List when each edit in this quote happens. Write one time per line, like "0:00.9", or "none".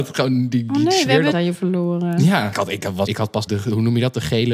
0:01.3
0:02.5
0:03.1
0:03.5